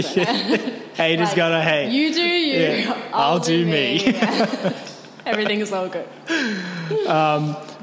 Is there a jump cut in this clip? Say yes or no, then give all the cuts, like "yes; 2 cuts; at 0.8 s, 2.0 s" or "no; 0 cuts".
yes; 1 cut; at 0.9 s